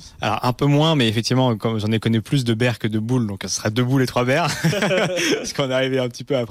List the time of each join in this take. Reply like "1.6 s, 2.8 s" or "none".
none